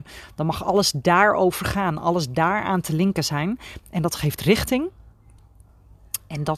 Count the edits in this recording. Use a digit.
0